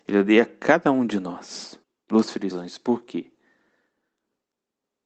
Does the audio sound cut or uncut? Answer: cut